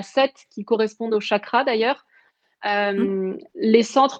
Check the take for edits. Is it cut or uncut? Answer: uncut